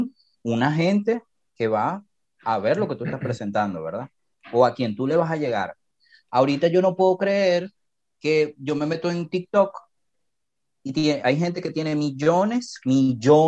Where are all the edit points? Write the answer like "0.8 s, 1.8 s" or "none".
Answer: 11.2 s